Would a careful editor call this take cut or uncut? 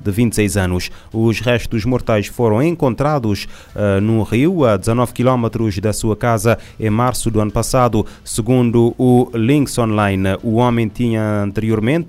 uncut